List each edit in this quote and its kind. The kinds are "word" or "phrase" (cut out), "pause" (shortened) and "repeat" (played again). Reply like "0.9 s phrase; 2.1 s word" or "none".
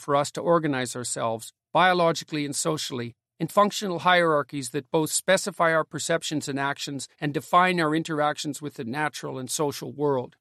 3.5 s word; 7.1 s pause